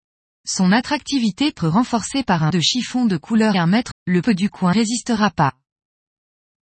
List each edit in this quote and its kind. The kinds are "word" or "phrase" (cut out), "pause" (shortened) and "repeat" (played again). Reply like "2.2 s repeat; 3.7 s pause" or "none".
1.6 s word; 2.5 s word; 3.5 s word; 3.9 s word; 4.2 s word; 4.7 s word

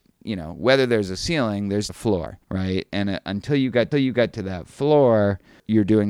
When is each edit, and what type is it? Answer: 1.9 s word; 2.4 s pause; 3.9 s repeat

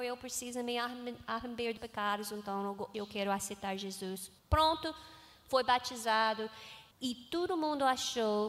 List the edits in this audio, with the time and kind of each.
1.8 s word; 2.9 s word; 4.4 s pause; 6.9 s pause

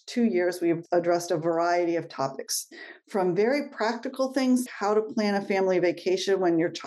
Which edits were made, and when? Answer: 4.7 s word

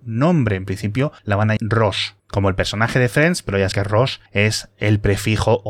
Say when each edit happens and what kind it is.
1.2 s pause; 1.6 s word; 2.2 s pause; 3.7 s word; 4.3 s pause

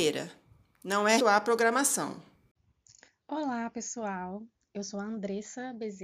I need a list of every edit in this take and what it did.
1.2 s word; 2.6 s pause

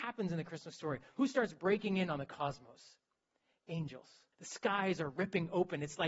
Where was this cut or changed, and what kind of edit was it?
4.3 s pause

